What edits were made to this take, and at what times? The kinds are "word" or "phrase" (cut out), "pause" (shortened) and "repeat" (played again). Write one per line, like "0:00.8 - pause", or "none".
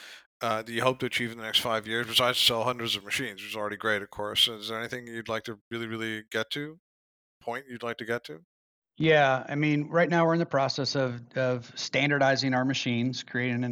none